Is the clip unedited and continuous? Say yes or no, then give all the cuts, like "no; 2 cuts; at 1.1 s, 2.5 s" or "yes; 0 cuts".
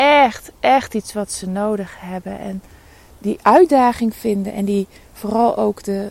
yes; 0 cuts